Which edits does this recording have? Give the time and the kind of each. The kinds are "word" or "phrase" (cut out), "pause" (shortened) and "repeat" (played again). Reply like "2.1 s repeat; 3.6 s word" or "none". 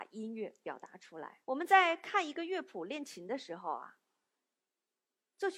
1.4 s pause